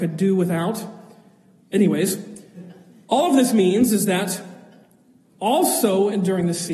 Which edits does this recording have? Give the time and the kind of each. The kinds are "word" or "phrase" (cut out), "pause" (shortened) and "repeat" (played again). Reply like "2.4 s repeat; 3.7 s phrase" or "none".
none